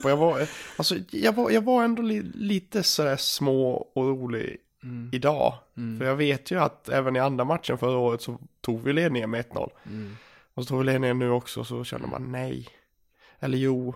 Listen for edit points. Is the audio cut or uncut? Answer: uncut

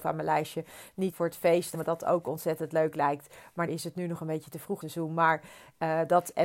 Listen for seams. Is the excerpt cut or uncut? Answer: cut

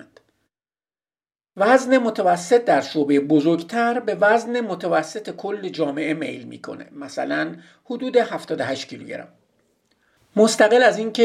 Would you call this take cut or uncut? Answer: uncut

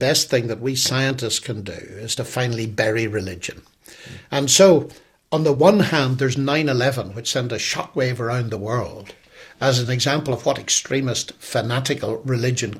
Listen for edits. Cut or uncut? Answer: uncut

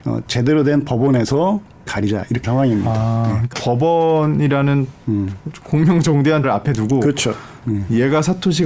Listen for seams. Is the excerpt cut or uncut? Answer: cut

